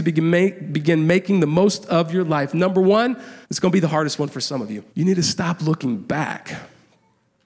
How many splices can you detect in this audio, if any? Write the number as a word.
two